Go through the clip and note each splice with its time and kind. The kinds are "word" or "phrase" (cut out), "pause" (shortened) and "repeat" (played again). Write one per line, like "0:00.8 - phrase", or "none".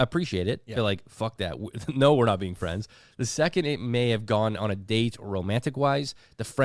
none